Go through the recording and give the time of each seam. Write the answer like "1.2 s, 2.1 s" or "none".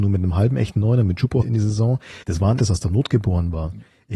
1.4 s, 2.2 s, 2.6 s